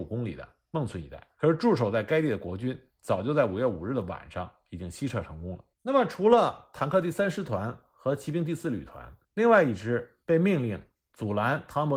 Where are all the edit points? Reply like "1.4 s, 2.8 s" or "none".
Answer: 1.3 s, 5.7 s, 9.2 s, 10.2 s